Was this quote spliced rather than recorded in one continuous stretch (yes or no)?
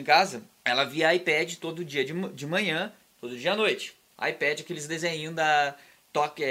no